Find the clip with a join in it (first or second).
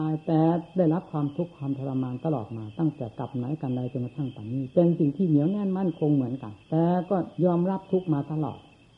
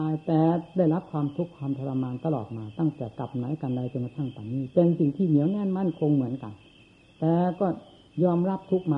first